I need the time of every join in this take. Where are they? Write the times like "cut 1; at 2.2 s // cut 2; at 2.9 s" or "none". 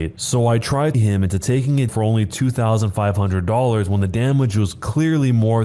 cut 1; at 0.9 s // cut 2; at 1.9 s